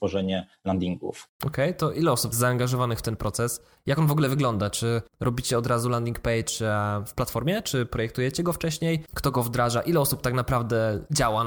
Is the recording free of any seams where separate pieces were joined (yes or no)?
no